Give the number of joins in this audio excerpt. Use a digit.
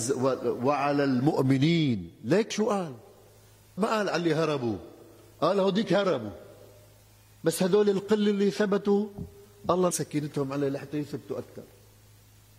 3